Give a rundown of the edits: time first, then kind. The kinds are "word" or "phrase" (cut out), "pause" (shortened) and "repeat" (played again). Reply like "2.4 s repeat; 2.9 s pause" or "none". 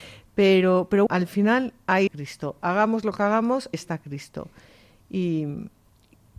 1.1 s word; 2.1 s word; 3.7 s word